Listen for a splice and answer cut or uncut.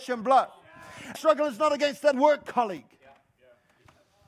cut